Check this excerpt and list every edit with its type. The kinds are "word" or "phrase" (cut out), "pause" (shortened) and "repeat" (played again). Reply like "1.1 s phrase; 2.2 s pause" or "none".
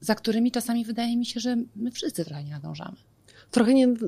none